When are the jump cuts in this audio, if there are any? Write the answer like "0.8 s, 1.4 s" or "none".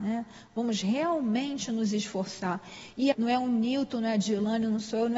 3.1 s